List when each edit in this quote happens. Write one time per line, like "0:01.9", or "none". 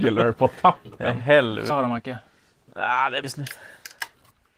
0:01.7
0:03.2